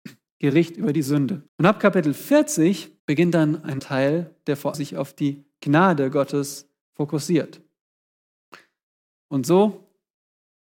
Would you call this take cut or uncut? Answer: cut